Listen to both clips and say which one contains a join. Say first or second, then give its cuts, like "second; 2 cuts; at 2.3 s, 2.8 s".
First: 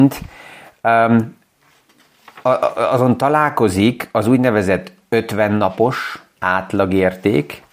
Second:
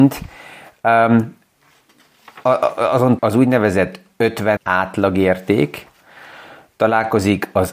second; 2 cuts; at 3.2 s, 4.6 s